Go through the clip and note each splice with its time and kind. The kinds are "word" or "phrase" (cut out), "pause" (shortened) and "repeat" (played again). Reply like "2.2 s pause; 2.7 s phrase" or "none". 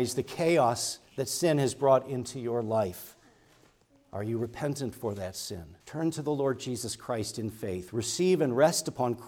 5.8 s pause